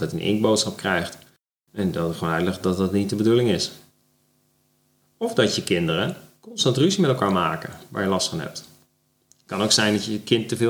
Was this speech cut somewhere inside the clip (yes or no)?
no